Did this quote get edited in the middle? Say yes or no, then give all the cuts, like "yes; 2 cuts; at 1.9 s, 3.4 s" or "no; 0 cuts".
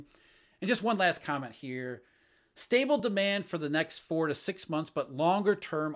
no; 0 cuts